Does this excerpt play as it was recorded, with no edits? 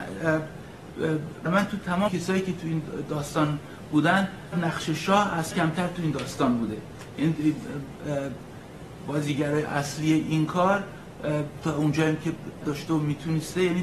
no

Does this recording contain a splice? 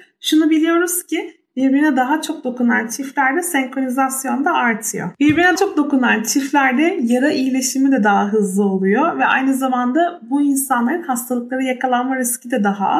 yes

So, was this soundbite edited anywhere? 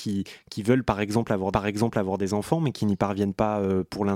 yes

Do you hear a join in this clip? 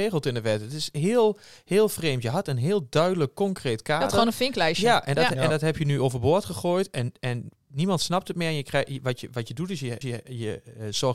yes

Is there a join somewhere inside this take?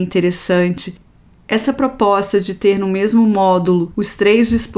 no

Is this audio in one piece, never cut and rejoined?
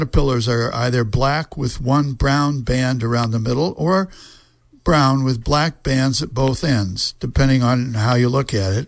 yes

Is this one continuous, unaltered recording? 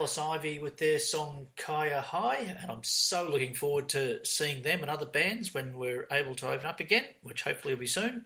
yes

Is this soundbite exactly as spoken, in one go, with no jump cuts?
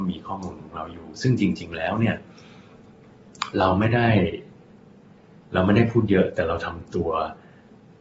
yes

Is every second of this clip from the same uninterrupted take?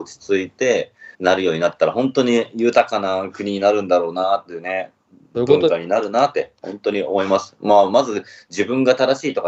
no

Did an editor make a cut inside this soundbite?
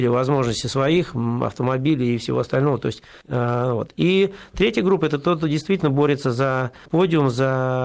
yes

